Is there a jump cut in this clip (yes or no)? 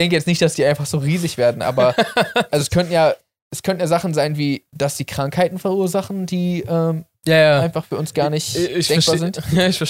no